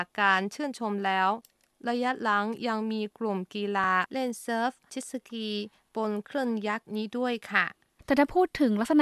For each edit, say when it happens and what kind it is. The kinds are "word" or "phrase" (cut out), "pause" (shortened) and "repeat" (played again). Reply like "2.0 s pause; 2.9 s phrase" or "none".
none